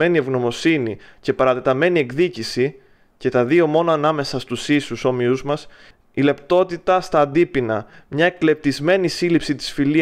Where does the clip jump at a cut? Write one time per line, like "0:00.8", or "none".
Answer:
none

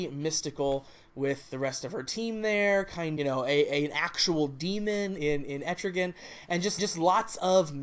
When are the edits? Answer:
0:03.2
0:05.2
0:06.8

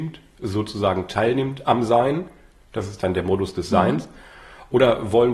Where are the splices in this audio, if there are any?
none

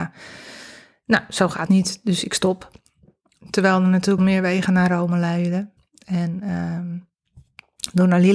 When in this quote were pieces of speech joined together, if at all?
0:01.7
0:04.2

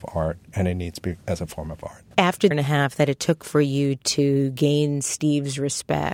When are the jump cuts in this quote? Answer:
0:01.2
0:02.1
0:02.5

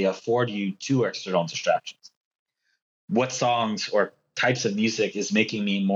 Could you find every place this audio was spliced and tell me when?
none

